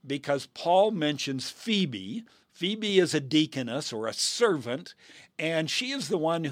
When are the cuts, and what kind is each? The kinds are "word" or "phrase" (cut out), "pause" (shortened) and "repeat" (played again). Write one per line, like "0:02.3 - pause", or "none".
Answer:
none

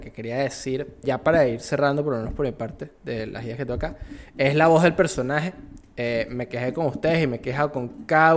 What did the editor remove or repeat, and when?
0:01.0 - word

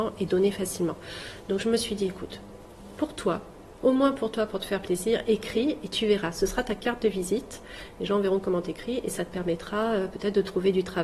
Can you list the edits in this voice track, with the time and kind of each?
none

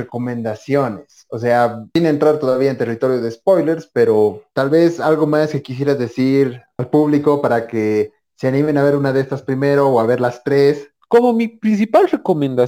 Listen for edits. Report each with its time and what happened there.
none

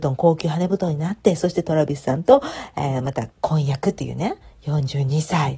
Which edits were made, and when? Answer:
0:03.3 - pause

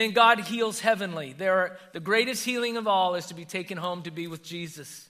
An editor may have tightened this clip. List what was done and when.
none

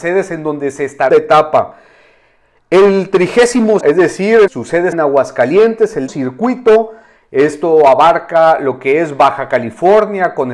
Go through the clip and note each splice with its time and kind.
0:01.1 - phrase
0:03.8 - word
0:04.5 - word
0:04.9 - word
0:06.1 - word

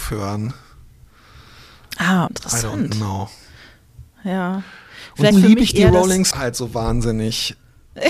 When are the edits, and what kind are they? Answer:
0:02.3 - word
0:05.3 - word
0:06.3 - word

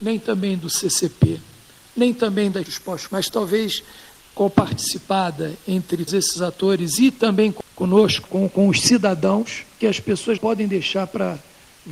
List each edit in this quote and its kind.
0:02.6 - word
0:03.1 - word
0:06.1 - word
0:08.2 - word
0:09.8 - word
0:10.4 - word

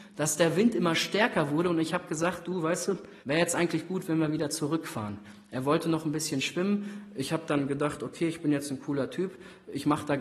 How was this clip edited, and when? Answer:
0:03.2 - pause

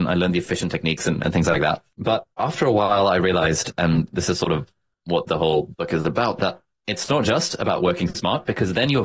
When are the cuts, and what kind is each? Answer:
0:02.3 - pause

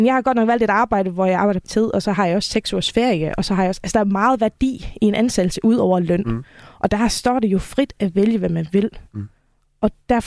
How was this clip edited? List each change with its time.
0:01.6 - word

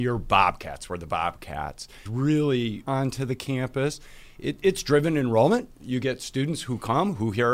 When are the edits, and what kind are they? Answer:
0:02.1 - word
0:02.8 - phrase

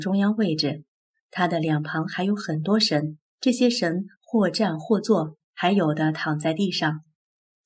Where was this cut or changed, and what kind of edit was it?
0:03.3 - pause
0:05.4 - pause

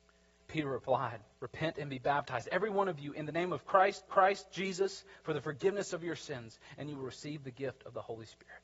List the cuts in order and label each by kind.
0:01.3 - pause
0:04.1 - repeat

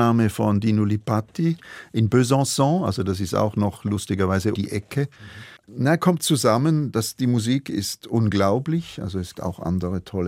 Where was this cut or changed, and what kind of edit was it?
0:04.5 - word
0:05.6 - pause
0:06.2 - word
0:09.3 - word

